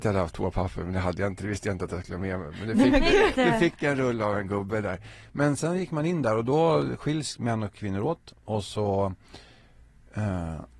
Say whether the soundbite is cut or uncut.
cut